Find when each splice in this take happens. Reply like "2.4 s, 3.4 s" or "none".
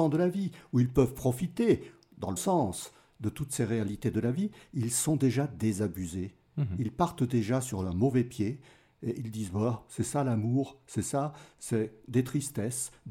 2.4 s

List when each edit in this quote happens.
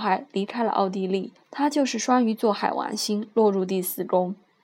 1.4 s

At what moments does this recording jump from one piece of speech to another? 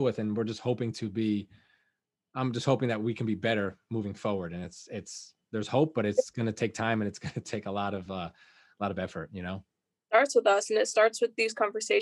none

